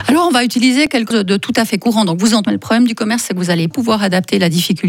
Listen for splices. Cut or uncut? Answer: cut